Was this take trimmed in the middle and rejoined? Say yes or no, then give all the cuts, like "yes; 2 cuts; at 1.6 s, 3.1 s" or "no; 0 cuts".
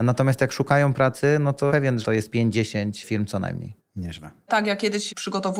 yes; 2 cuts; at 1.7 s, 2.0 s